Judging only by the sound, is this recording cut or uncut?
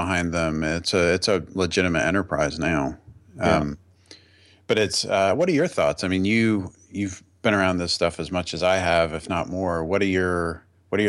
uncut